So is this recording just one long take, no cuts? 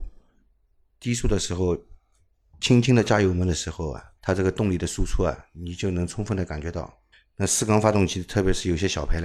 no; 2 cuts; at 4.2 s, 7.1 s

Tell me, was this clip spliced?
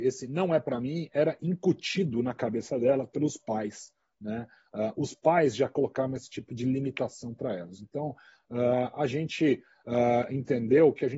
no; 0 cuts

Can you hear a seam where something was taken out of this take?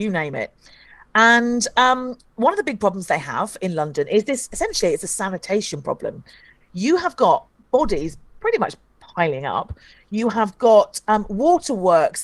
no; 0 cuts

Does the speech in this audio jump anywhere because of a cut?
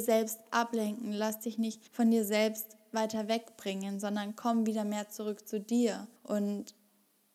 yes; 2 cuts; at 1.9 s, 6.2 s

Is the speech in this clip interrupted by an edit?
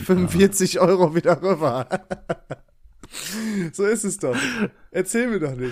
no; 0 cuts

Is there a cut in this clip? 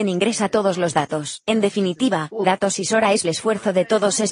yes; 2 cuts; at 2.4 s, 3.2 s

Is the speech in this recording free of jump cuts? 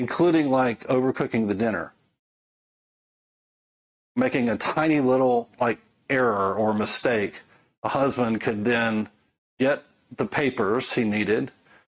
yes; 0 cuts

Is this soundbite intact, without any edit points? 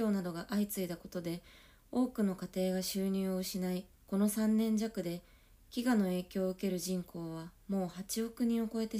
no; 1 cut; at 3.9 s

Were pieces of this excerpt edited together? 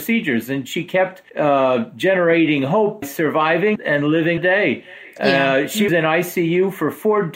yes; 5 cuts; at 1.3 s, 3.0 s, 3.8 s, 4.4 s, 5.9 s

